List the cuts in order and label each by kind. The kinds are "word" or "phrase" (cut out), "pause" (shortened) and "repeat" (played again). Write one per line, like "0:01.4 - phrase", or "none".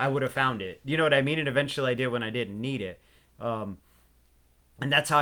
none